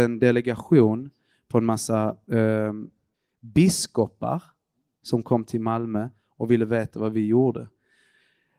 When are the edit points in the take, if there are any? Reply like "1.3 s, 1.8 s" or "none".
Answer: none